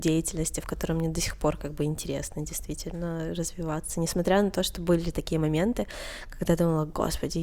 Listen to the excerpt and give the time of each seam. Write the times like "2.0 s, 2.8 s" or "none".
none